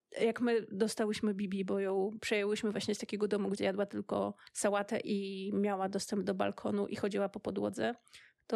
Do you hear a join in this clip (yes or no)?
yes